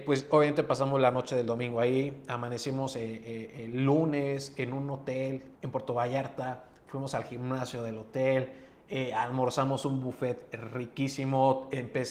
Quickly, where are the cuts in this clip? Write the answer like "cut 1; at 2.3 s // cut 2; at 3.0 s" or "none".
cut 1; at 5.6 s